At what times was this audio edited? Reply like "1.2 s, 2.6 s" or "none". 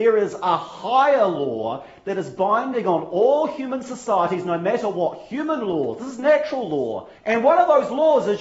7.2 s